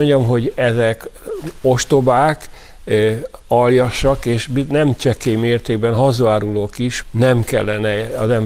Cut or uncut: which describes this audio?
cut